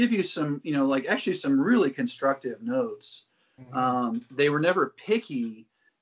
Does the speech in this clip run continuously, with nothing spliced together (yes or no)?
yes